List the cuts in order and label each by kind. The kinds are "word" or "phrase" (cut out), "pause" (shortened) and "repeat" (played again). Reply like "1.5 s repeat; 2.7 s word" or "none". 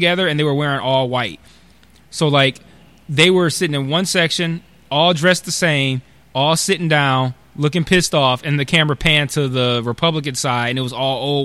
none